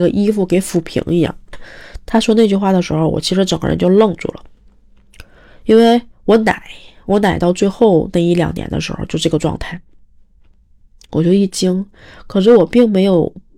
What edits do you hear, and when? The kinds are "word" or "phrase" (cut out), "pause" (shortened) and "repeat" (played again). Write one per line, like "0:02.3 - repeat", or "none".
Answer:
0:06.1 - pause